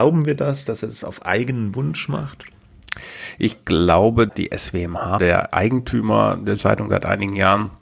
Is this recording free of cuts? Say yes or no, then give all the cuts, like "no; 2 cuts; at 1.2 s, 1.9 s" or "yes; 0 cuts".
no; 3 cuts; at 4.3 s, 5.2 s, 6.6 s